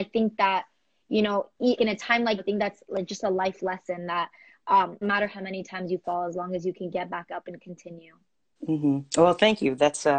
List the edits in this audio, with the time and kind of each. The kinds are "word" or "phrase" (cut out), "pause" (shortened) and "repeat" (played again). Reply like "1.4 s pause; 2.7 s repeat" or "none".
1.8 s word; 2.4 s word; 5.0 s phrase